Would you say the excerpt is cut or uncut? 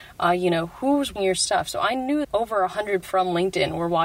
cut